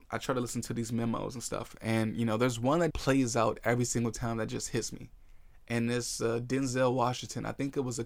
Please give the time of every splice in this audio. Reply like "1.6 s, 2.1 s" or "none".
2.9 s